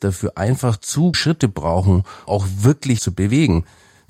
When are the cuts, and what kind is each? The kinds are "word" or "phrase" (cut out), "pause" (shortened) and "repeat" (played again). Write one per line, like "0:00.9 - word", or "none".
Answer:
0:01.1 - word
0:02.3 - word
0:03.0 - word